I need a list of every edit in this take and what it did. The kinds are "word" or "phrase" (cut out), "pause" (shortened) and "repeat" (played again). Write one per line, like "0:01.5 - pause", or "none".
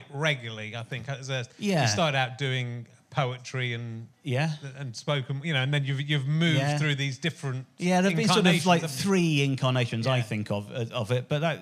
0:01.5 - pause
0:04.1 - pause